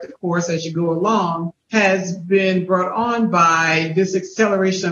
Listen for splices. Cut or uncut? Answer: cut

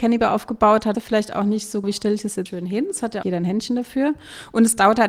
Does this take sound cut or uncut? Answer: cut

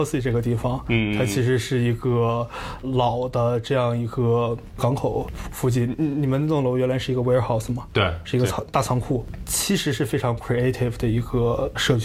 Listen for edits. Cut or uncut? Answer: uncut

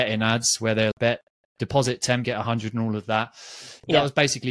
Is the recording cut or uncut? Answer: cut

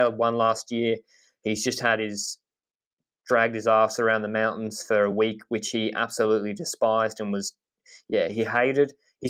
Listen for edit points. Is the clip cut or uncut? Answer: uncut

